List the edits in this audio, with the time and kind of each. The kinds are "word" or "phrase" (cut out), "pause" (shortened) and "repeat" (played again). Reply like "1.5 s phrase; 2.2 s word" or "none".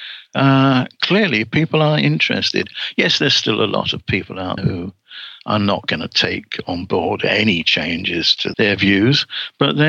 4.6 s word; 8.5 s word